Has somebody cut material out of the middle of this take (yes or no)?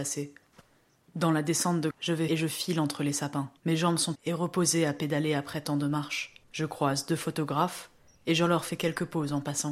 yes